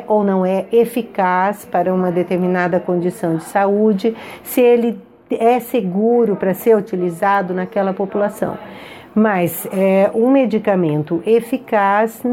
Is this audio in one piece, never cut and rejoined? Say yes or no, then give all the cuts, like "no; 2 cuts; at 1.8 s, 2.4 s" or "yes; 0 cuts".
yes; 0 cuts